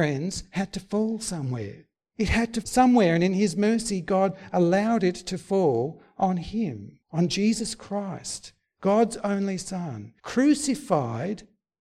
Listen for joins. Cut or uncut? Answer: cut